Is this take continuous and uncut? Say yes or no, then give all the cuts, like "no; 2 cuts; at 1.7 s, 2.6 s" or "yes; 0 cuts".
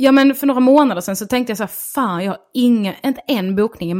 yes; 0 cuts